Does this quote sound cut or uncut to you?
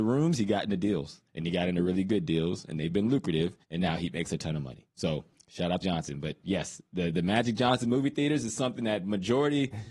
cut